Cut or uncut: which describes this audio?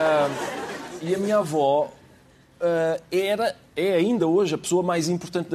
uncut